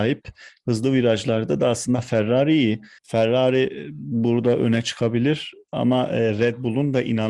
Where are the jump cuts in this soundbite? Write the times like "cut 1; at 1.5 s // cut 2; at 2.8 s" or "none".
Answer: cut 1; at 3.0 s